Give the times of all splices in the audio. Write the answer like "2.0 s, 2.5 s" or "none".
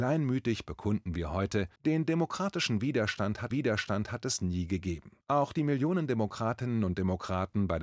1.8 s, 3.5 s, 5.2 s